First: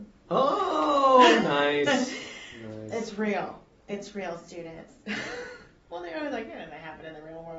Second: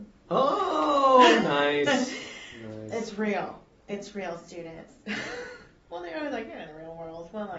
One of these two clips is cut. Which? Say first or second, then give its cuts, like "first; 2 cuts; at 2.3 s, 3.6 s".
second; 1 cut; at 6.7 s